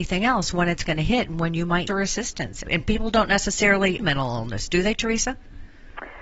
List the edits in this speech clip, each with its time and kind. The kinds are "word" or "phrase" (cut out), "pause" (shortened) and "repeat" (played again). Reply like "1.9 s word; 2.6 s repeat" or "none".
1.9 s phrase; 2.6 s word; 4.0 s word